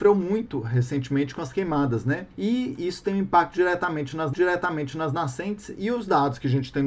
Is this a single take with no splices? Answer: no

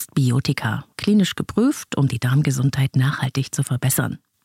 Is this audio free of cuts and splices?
yes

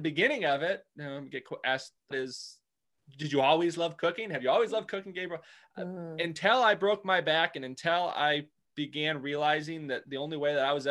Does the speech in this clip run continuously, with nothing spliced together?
no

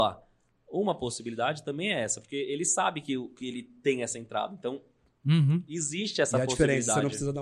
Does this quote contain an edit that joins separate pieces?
no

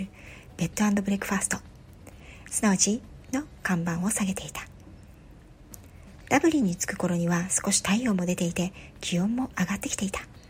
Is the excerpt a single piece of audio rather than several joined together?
no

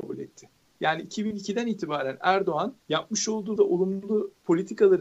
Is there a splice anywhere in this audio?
yes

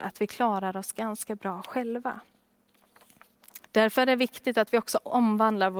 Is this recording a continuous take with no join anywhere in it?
no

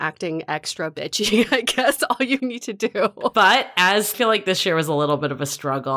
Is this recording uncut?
no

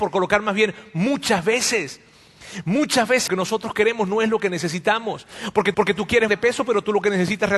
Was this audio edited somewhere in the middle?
yes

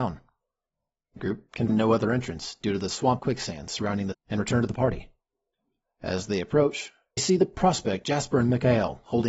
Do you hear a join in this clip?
yes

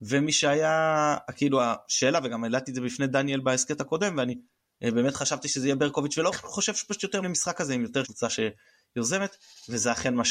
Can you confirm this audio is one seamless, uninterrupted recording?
no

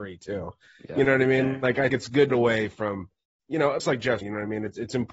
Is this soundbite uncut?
no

